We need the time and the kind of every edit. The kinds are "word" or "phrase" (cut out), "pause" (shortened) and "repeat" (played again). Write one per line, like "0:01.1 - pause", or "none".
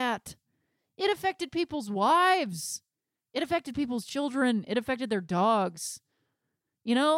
none